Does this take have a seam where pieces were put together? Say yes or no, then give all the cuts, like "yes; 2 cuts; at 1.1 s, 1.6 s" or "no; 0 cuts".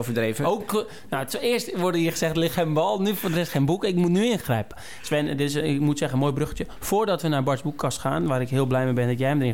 no; 0 cuts